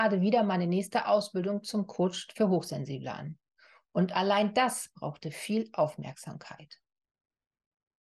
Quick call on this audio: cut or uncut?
uncut